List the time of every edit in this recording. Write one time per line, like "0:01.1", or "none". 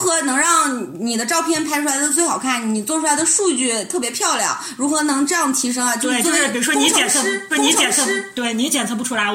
0:07.5